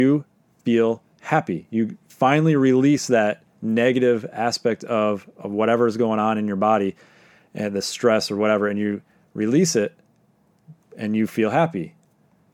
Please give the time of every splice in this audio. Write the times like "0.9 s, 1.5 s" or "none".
none